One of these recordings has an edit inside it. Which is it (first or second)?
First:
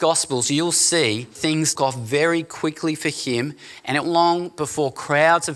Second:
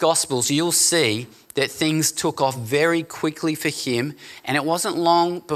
first